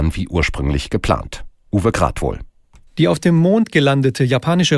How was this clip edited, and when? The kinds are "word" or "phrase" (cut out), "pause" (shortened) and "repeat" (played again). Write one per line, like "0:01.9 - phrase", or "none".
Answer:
none